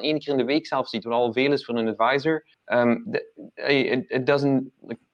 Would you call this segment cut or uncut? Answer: cut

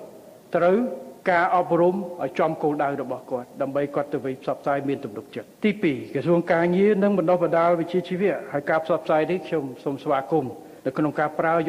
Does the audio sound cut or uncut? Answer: cut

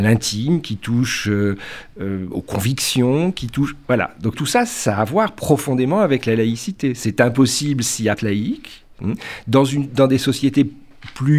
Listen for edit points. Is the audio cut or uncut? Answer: cut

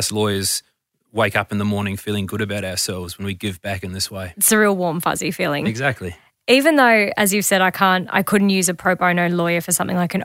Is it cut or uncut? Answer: uncut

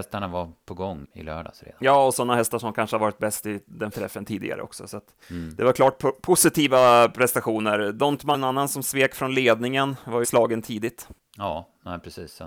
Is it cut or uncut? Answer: cut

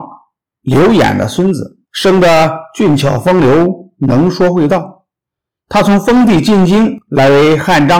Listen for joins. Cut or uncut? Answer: cut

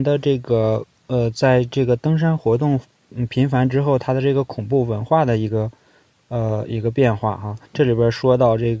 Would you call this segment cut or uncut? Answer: cut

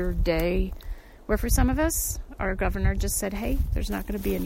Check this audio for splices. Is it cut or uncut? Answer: uncut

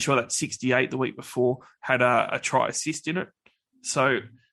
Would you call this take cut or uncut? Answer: uncut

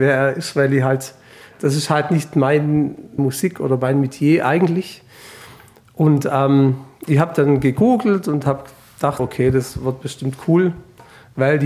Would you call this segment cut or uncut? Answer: cut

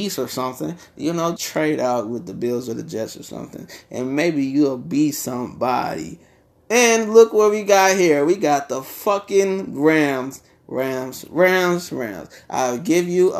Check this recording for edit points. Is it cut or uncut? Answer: cut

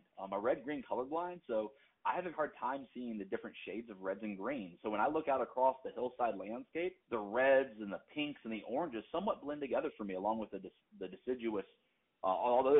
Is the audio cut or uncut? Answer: cut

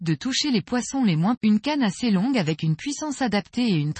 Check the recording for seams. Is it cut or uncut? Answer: cut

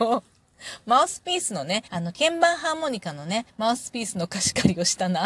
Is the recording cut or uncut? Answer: cut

